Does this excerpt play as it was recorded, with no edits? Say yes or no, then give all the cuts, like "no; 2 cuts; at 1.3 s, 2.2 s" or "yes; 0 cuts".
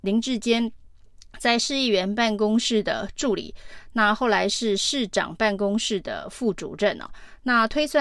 yes; 0 cuts